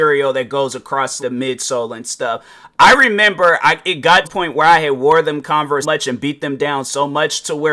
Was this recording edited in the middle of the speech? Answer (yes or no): yes